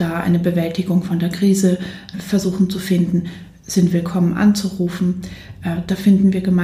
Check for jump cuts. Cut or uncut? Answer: cut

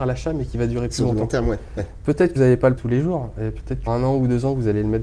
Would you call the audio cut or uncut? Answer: cut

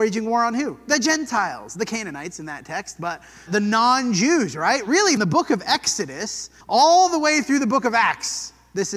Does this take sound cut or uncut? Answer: cut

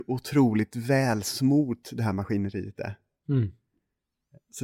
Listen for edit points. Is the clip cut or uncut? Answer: uncut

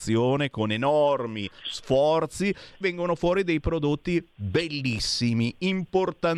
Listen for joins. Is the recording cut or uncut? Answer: cut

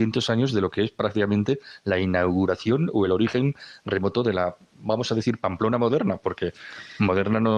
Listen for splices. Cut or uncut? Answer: uncut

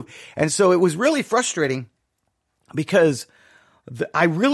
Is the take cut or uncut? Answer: uncut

